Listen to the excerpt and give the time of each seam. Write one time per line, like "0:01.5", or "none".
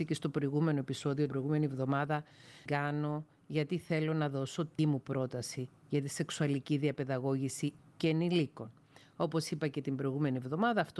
0:01.3
0:02.7
0:04.8
0:07.8